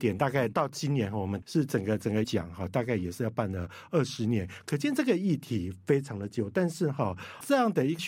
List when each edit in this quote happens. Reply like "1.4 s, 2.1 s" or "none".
2.2 s